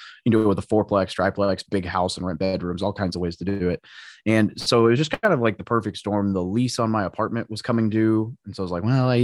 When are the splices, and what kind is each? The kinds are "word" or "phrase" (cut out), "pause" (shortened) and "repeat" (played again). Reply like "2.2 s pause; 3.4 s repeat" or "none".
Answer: none